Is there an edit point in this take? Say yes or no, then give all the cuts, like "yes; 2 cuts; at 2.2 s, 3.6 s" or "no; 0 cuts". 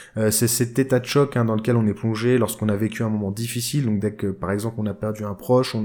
no; 0 cuts